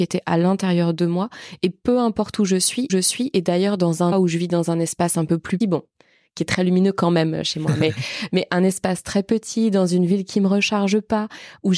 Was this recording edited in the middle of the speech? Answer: yes; 3 cuts; at 2.9 s, 4.1 s, 5.6 s

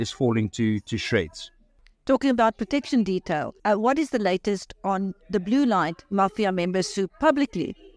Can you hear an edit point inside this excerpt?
yes; 1 cut; at 3.6 s

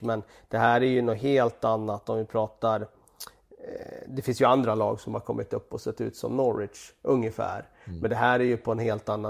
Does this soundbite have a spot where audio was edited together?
no; 0 cuts

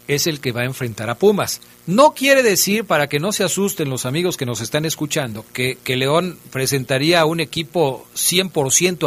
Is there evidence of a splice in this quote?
yes; 1 cut; at 1.7 s

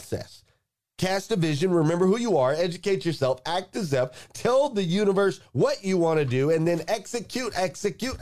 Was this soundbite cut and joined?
no; 0 cuts

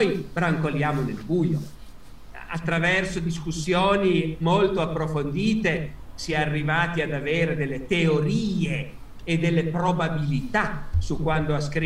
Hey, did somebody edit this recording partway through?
no; 0 cuts

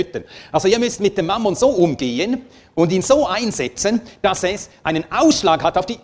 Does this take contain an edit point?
no; 0 cuts

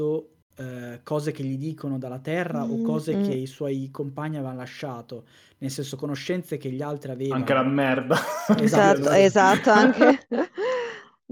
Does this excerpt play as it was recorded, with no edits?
yes; 0 cuts

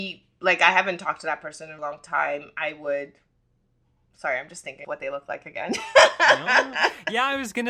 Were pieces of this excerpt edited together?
yes; 2 cuts; at 1.8 s, 4.8 s

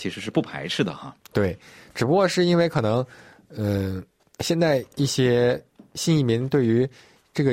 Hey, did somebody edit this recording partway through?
no; 0 cuts

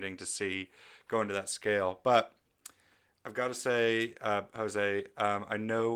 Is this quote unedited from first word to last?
yes; 0 cuts

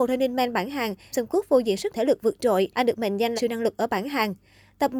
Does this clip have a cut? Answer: yes; 4 cuts; at 1.1 s, 1.9 s, 2.7 s, 3.4 s

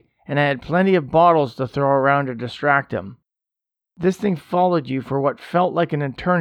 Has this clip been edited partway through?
no; 0 cuts

